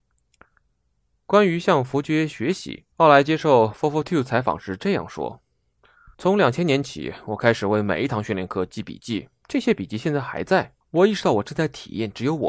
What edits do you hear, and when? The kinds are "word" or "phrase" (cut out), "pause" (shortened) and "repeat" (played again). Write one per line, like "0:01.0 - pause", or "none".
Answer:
0:02.9 - pause
0:06.1 - pause
0:09.4 - pause
0:10.8 - pause